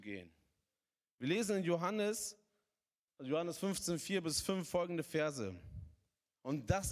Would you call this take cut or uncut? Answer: cut